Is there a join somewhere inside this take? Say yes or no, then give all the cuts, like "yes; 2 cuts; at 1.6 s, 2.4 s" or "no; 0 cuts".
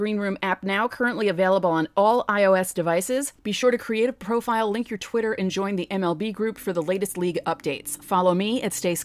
yes; 1 cut; at 3.4 s